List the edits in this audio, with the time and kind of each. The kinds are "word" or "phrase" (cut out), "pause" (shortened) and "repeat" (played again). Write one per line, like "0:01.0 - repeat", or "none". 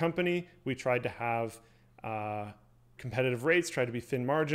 0:03.0 - word